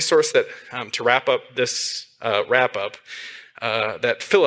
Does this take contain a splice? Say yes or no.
no